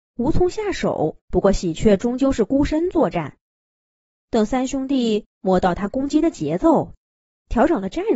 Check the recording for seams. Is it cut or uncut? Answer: cut